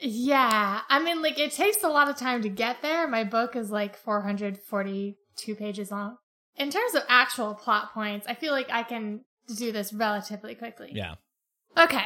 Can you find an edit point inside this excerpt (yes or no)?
no